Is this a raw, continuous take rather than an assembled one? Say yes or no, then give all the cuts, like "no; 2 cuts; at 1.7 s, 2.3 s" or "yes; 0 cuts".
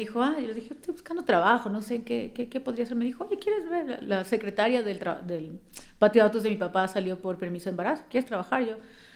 yes; 0 cuts